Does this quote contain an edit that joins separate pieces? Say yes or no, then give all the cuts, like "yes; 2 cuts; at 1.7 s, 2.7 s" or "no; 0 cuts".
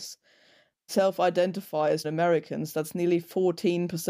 yes; 1 cut; at 2.0 s